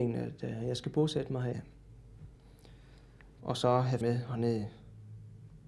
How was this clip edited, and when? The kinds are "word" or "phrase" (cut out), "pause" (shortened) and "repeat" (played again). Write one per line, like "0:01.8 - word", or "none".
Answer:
0:04.0 - word